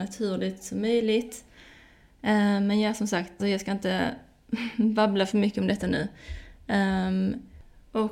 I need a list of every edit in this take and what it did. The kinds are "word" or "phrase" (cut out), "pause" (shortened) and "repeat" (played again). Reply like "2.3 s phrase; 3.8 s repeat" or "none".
3.4 s word